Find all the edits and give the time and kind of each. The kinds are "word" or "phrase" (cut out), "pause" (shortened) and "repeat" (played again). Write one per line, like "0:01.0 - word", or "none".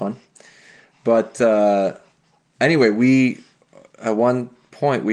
none